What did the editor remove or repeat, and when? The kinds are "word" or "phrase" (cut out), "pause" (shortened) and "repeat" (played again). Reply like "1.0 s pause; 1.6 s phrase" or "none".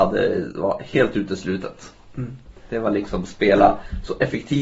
none